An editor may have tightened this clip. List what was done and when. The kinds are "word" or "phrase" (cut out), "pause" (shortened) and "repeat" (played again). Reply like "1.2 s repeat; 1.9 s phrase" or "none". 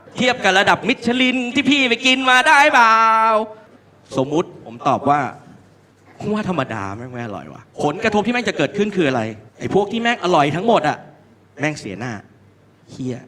3.8 s pause; 7.7 s pause; 9.5 s pause